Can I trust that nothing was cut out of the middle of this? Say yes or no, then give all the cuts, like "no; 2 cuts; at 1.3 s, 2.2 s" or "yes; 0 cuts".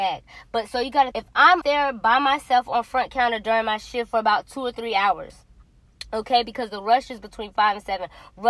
no; 2 cuts; at 1.1 s, 1.6 s